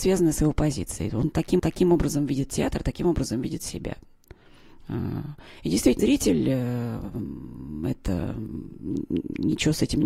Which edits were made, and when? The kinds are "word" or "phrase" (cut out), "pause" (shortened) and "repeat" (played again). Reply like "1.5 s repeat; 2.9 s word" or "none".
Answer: 1.6 s repeat; 5.5 s pause; 6.0 s word